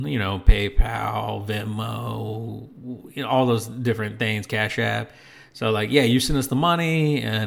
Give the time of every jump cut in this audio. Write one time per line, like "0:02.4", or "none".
none